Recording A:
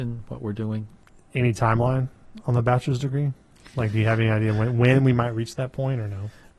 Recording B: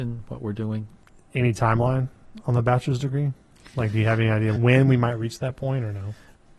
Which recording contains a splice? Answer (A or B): B